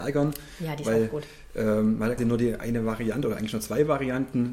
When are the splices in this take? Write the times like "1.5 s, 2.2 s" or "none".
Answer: 2.2 s

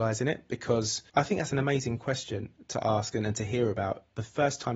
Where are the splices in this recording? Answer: 1.1 s

